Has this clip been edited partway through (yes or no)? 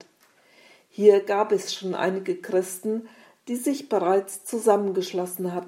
no